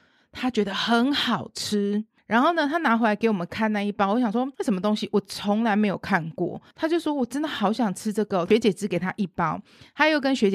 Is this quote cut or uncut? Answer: cut